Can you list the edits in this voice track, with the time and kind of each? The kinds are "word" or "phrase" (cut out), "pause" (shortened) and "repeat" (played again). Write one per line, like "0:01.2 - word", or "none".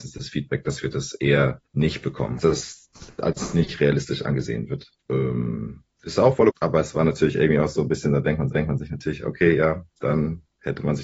0:01.7 - pause
0:02.4 - phrase
0:05.0 - pause
0:06.5 - word
0:08.5 - repeat

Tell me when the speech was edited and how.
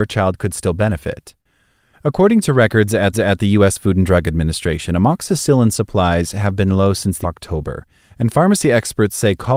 0:03.1 - repeat
0:07.2 - phrase

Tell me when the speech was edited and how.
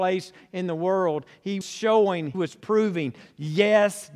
0:01.6 - word
0:02.3 - word

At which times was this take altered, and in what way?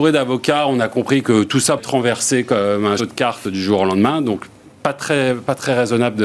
0:01.8 - word
0:03.0 - word

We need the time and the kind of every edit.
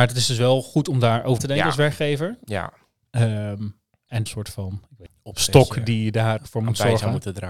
0:01.4 - word
0:04.3 - phrase
0:05.1 - word
0:06.4 - word

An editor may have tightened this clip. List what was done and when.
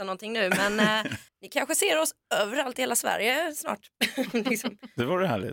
0:01.3 - pause

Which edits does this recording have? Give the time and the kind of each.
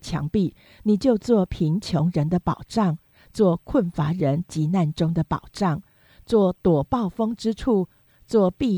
none

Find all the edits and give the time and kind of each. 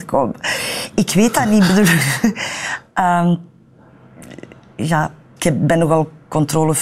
0:05.4 - word

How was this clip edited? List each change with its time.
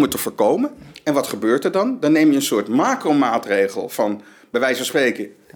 none

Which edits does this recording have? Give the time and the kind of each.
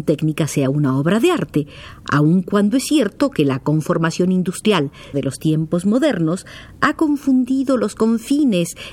0:05.1 - word

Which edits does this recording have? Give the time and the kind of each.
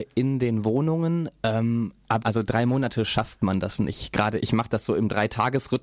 0:02.2 - phrase
0:04.4 - word

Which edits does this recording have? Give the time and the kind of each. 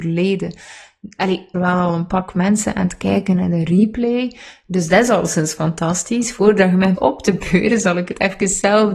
0:01.5 - phrase
0:06.9 - word

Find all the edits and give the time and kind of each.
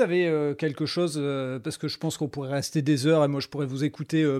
none

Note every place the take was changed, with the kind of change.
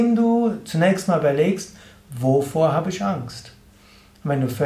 none

